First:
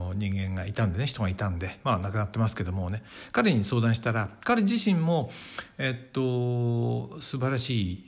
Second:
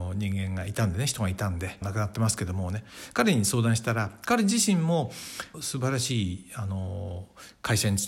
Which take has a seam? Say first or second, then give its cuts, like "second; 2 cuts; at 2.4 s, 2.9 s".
second; 2 cuts; at 1.8 s, 5.5 s